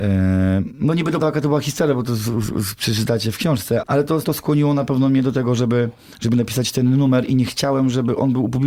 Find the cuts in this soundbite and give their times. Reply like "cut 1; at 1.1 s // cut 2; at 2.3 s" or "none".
cut 1; at 1.2 s // cut 2; at 3.8 s // cut 3; at 4.2 s